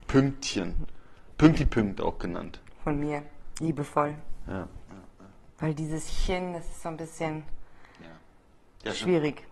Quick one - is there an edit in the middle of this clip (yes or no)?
no